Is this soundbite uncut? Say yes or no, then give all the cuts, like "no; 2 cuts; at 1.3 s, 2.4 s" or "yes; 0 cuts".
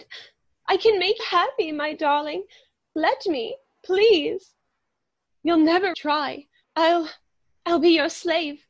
no; 3 cuts; at 1.2 s, 5.9 s, 6.6 s